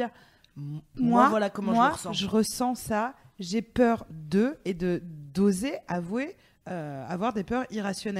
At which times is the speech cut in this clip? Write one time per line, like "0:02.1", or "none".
none